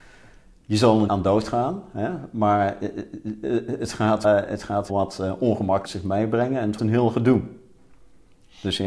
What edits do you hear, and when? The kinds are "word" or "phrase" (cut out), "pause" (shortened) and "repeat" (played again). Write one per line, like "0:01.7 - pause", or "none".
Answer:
0:01.1 - word
0:04.2 - word
0:04.9 - word
0:05.8 - word
0:06.8 - word